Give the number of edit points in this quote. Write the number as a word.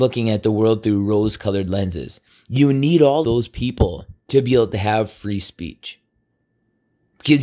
two